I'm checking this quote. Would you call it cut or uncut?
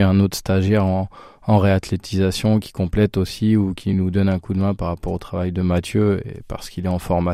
uncut